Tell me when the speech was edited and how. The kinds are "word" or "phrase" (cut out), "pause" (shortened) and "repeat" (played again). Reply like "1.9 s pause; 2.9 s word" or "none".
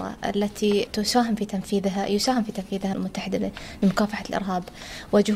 2.9 s word